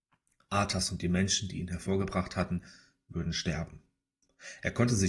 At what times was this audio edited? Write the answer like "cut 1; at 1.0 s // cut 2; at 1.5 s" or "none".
none

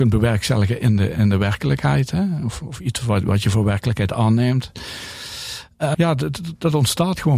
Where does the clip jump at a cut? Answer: cut 1; at 5.9 s

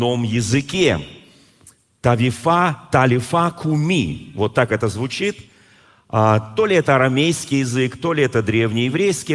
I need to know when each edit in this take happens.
none

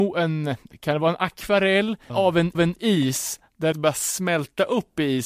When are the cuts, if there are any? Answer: cut 1; at 2.1 s // cut 2; at 2.5 s // cut 3; at 3.7 s

